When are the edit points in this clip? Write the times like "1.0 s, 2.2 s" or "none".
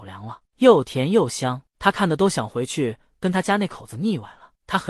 none